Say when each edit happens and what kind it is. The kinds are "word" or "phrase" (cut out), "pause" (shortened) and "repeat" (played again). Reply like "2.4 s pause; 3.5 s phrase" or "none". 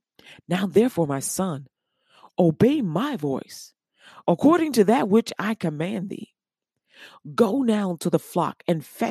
none